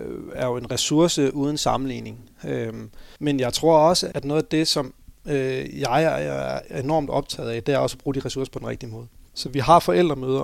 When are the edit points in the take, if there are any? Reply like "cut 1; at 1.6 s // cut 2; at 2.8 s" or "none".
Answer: cut 1; at 3.2 s // cut 2; at 4.1 s